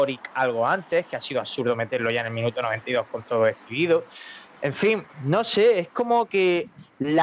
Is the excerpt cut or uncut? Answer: uncut